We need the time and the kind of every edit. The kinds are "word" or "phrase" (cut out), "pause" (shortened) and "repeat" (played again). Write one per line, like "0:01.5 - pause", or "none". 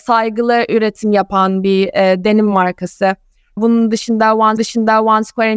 0:04.6 - repeat